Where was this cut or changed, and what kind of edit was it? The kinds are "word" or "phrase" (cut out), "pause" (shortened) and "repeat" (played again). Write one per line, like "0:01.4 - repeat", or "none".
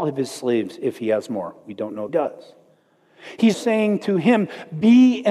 0:02.1 - phrase
0:03.5 - word